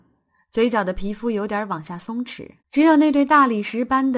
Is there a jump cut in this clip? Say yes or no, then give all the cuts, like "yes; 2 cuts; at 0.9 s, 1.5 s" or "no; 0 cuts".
yes; 1 cut; at 2.6 s